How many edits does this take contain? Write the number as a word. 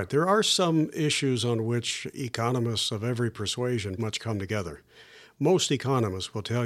one